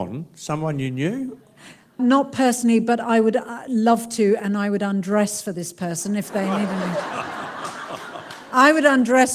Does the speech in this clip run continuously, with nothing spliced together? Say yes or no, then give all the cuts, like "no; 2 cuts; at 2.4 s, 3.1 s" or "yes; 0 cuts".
yes; 0 cuts